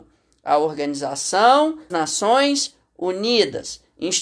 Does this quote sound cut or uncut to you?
cut